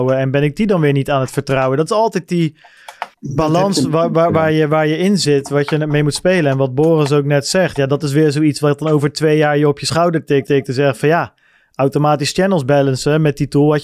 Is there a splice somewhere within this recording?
yes; 2 cuts; at 3.1 s, 10.4 s

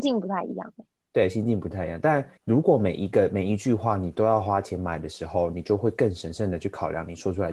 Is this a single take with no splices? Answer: no; 1 cut; at 2.4 s

